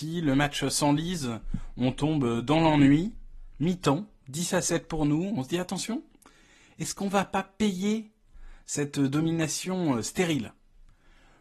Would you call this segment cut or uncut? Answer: uncut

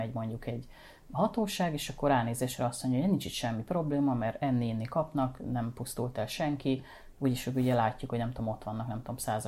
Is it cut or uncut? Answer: uncut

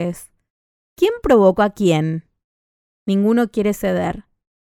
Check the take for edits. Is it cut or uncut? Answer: uncut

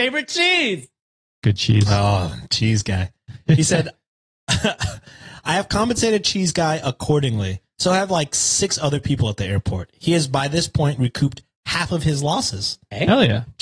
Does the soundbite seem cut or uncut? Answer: uncut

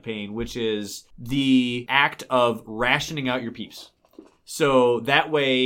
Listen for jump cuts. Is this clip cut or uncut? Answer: uncut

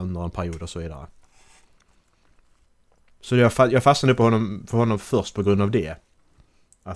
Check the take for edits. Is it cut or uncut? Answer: uncut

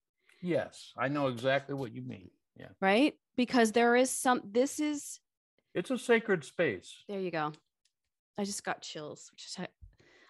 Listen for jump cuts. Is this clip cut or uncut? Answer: uncut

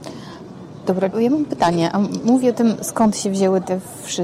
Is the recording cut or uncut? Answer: cut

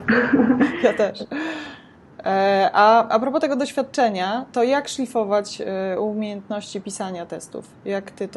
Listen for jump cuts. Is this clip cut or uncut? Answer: uncut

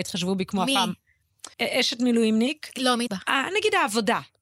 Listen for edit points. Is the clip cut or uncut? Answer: cut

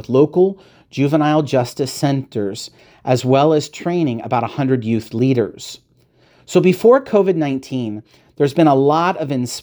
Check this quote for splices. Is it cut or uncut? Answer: uncut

